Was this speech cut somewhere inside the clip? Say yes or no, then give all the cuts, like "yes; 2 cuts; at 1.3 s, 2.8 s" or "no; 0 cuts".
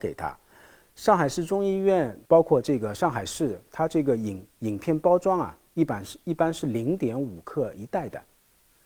yes; 1 cut; at 2.2 s